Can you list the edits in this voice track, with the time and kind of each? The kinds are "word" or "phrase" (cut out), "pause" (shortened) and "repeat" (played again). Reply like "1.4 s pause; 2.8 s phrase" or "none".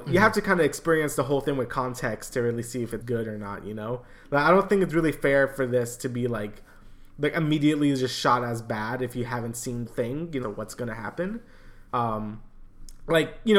3.0 s word; 9.9 s phrase; 10.4 s phrase; 11.9 s pause